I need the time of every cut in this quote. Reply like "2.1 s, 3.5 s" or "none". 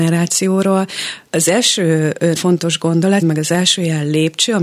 1.3 s, 2.4 s, 3.2 s